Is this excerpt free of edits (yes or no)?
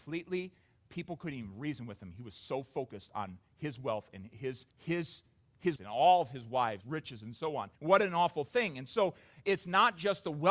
no